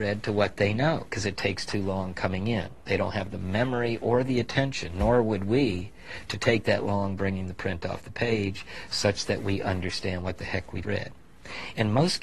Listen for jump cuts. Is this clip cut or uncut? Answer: cut